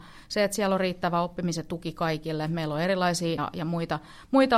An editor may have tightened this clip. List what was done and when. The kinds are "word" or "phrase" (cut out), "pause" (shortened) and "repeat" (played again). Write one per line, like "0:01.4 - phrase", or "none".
0:03.4 - word